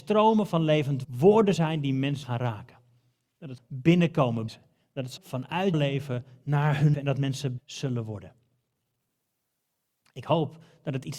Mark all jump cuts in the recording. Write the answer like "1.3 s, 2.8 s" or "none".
1.0 s, 1.6 s, 2.2 s, 3.6 s, 4.5 s, 5.2 s, 5.7 s, 6.9 s, 7.6 s